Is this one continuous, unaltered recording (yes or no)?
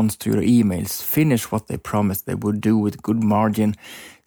yes